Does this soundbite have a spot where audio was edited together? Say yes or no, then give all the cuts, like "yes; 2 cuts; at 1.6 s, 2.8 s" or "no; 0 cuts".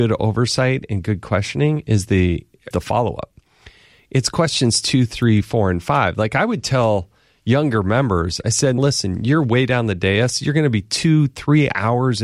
yes; 2 cuts; at 2.7 s, 8.8 s